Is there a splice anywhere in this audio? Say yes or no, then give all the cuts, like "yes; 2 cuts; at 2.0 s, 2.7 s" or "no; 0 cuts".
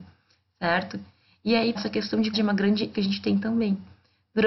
yes; 3 cuts; at 1.7 s, 2.3 s, 2.9 s